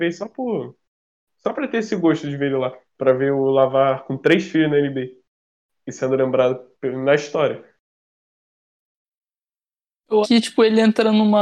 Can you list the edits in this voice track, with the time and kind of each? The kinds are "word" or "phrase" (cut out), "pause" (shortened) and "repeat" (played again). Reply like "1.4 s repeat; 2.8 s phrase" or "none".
2.9 s pause; 6.7 s pause; 10.2 s word